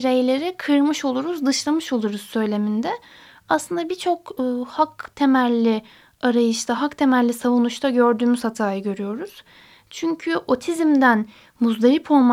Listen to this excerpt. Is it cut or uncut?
uncut